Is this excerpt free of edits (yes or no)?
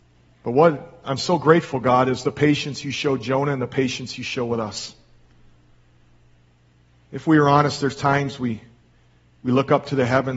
yes